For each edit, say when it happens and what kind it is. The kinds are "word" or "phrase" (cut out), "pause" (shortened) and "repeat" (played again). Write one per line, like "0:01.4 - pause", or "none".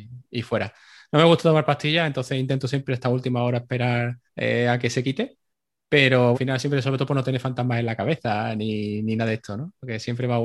0:04.3 - pause
0:06.3 - word